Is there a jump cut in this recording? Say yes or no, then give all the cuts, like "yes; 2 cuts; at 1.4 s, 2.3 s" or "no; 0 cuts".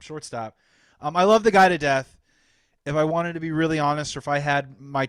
no; 0 cuts